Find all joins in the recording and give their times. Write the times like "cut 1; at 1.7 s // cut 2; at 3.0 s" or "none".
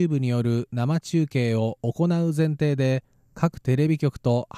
none